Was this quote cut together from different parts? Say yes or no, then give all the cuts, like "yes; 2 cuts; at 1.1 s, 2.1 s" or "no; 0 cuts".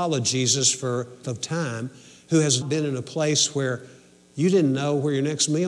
yes; 2 cuts; at 1.2 s, 2.6 s